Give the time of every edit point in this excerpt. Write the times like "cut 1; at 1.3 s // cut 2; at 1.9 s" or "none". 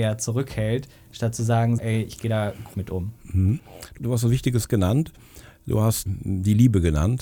cut 1; at 1.8 s // cut 2; at 2.7 s // cut 3; at 4.0 s // cut 4; at 6.1 s